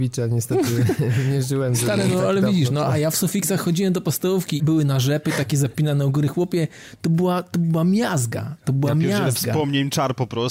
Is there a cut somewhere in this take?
yes; 1 cut; at 4.6 s

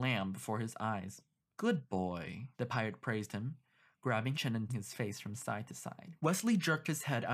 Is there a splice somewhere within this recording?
yes; 5 cuts; at 1.4 s, 2.5 s, 4.3 s, 4.7 s, 6.2 s

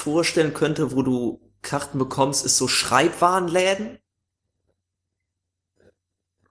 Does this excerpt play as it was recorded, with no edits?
yes; 0 cuts

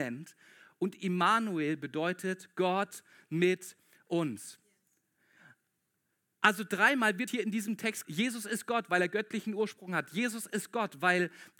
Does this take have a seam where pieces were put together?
yes; 2 cuts; at 7.3 s, 8.0 s

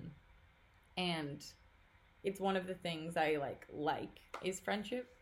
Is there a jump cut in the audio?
no; 0 cuts

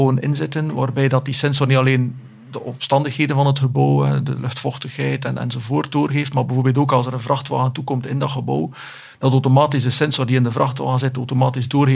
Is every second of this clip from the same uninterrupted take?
yes; 0 cuts

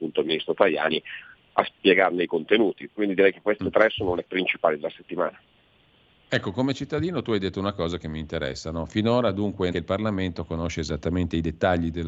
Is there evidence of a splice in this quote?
yes; 3 cuts; at 2.9 s, 4.3 s, 9.7 s

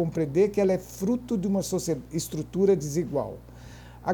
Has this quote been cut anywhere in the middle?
no; 0 cuts

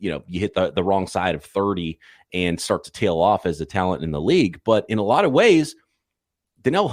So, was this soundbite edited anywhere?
no; 0 cuts

